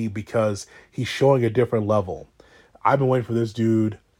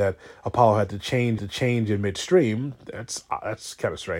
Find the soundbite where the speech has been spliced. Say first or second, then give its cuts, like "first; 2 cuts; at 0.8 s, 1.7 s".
second; 1 cut; at 1.4 s